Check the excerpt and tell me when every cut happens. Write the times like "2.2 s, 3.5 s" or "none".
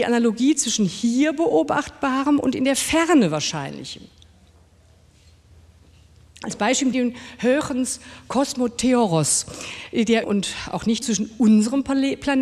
6.9 s, 10.2 s, 11.0 s